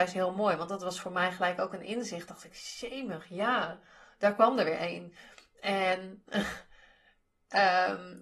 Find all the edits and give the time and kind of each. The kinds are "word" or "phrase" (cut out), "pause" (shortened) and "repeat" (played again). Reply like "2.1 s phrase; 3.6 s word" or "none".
none

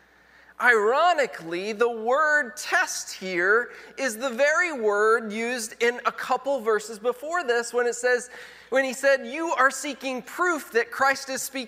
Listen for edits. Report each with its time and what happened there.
none

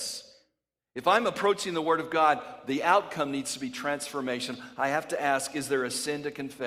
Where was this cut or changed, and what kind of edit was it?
none

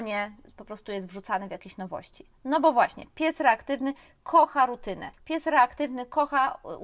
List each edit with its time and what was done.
5.1 s pause

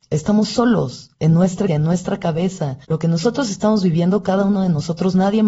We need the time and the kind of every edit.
1.7 s word; 2.8 s pause

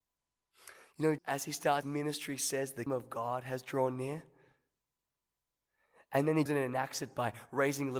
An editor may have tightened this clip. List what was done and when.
1.2 s word; 1.8 s word; 2.9 s word; 6.5 s word

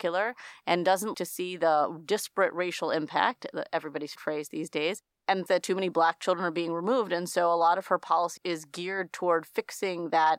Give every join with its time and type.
1.1 s word; 4.2 s word; 5.5 s word; 8.4 s word

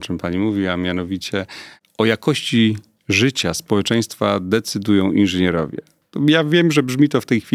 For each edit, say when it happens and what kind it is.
none

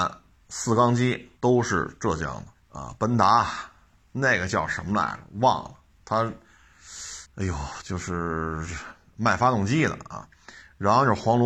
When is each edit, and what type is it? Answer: 1.4 s pause; 2.6 s pause; 7.3 s pause

